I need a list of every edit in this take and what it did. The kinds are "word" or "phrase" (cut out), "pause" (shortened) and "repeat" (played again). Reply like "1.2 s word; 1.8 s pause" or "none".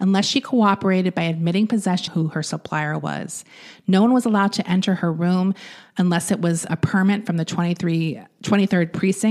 2.1 s phrase; 6.7 s word